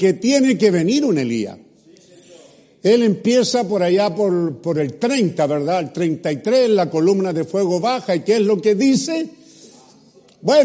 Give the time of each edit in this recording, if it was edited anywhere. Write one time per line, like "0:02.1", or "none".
none